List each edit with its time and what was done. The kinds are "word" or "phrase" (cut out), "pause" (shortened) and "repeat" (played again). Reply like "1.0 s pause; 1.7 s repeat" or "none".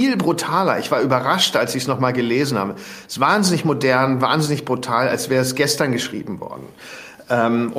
none